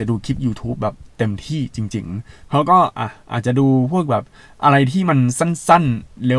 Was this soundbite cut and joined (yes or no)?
no